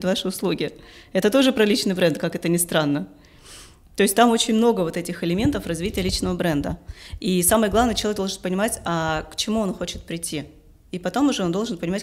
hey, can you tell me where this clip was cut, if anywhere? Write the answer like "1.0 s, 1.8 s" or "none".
none